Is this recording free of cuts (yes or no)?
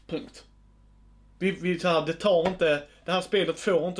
yes